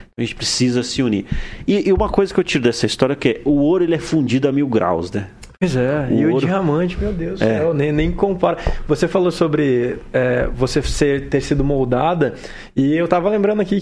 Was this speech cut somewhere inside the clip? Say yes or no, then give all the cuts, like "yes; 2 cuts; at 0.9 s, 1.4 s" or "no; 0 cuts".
no; 0 cuts